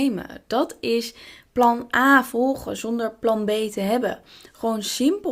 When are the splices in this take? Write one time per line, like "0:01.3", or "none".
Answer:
none